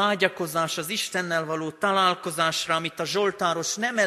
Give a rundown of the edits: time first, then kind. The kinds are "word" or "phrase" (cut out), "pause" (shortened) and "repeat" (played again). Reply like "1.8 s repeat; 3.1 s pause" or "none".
none